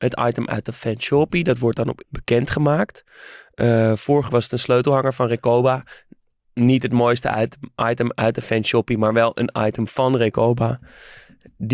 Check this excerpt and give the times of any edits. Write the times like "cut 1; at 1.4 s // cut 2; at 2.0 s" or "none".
cut 1; at 2.0 s // cut 2; at 4.3 s